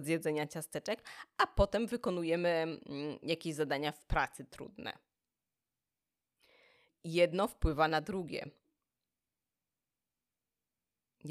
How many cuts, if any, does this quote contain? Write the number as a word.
zero